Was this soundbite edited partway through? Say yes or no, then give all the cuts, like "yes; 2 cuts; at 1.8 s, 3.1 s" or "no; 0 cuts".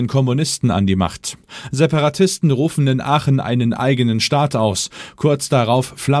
no; 0 cuts